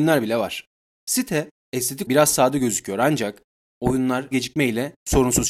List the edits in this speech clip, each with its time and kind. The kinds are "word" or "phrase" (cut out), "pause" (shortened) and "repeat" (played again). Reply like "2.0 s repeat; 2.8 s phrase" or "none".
2.0 s word; 4.3 s phrase